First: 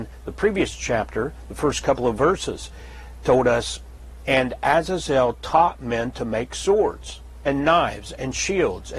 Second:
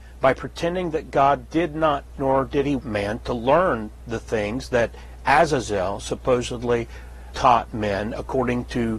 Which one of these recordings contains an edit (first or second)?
second